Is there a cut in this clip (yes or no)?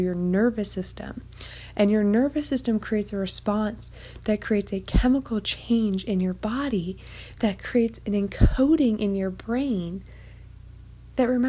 no